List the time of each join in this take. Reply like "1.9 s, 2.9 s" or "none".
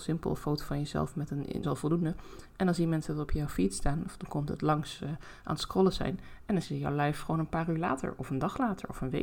1.6 s, 5.0 s, 6.6 s